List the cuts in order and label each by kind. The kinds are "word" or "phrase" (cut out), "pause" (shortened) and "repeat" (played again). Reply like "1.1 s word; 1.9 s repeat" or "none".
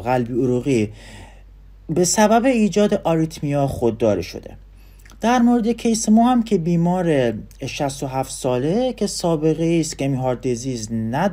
none